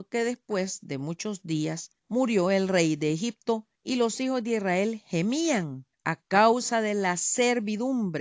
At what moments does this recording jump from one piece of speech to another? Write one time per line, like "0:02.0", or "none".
0:02.0
0:03.7
0:05.9